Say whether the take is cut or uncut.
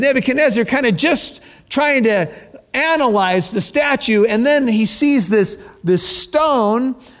uncut